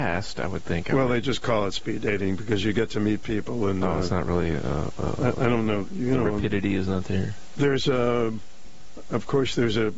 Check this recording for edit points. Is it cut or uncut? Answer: uncut